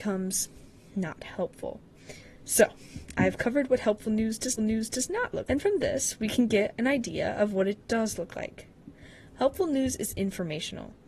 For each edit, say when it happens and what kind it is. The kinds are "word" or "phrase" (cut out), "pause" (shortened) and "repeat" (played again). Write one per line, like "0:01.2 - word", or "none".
0:04.6 - repeat
0:05.5 - word